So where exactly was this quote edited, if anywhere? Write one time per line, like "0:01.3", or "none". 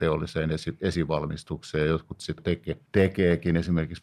0:02.4
0:02.9